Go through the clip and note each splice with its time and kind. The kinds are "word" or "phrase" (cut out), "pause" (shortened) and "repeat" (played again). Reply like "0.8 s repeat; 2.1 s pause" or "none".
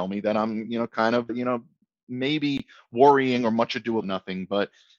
1.3 s word; 1.8 s pause; 4.0 s word